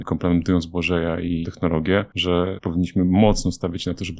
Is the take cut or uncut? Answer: cut